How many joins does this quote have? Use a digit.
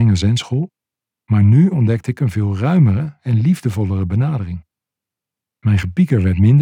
0